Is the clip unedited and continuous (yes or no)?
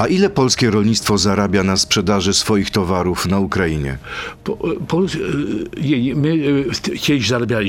yes